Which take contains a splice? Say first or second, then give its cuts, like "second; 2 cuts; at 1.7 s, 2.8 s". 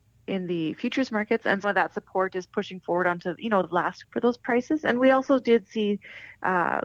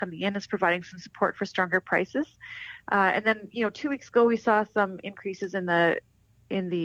first; 4 cuts; at 1.1 s, 1.6 s, 3.6 s, 4.0 s